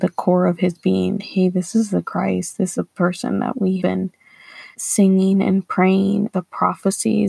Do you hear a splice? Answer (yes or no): yes